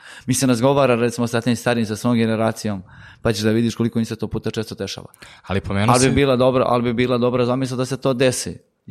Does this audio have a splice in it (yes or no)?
no